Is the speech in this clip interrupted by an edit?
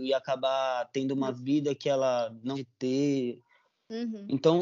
yes; 1 cut; at 2.5 s

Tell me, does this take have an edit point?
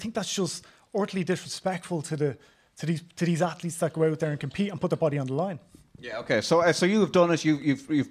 no; 0 cuts

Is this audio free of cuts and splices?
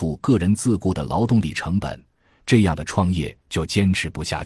yes; 0 cuts

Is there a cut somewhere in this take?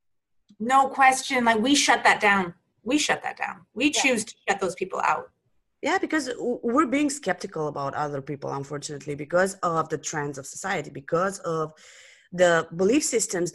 no; 0 cuts

